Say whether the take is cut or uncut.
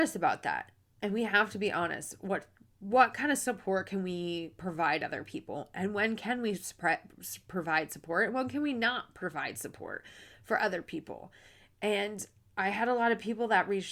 uncut